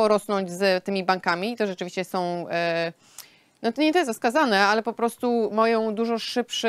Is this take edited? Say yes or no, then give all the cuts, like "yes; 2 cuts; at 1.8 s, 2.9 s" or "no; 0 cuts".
no; 0 cuts